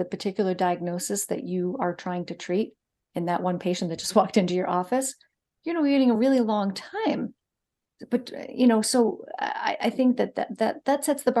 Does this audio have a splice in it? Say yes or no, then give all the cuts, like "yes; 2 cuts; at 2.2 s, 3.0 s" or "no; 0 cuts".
no; 0 cuts